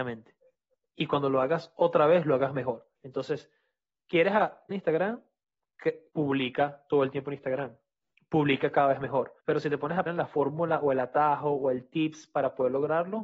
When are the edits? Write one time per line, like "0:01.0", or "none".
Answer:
0:03.0
0:04.7
0:06.1
0:09.4
0:10.1